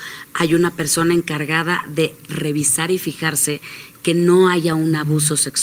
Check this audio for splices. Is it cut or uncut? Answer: uncut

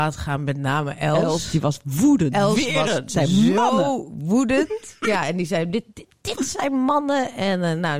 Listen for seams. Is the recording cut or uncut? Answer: uncut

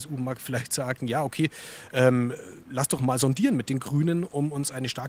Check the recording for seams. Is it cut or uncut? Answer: cut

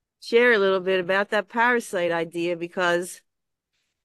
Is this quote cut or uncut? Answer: uncut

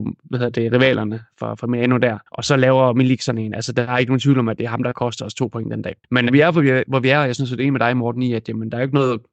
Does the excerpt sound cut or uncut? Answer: cut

